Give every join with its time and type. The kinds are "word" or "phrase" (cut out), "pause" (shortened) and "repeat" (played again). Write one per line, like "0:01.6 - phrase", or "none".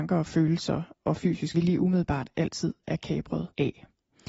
0:01.5 - phrase